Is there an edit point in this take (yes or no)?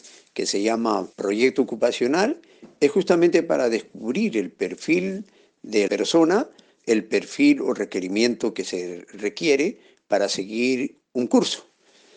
yes